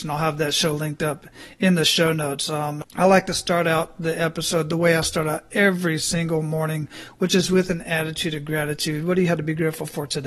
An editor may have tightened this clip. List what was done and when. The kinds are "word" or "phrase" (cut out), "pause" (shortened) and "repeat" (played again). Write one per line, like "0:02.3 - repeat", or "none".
none